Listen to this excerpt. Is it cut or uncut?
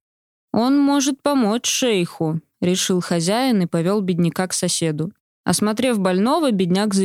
cut